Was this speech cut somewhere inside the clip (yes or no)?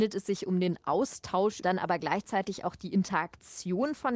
yes